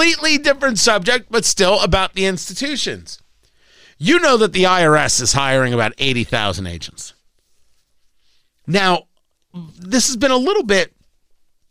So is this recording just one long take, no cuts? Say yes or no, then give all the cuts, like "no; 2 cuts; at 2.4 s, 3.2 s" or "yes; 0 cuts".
yes; 0 cuts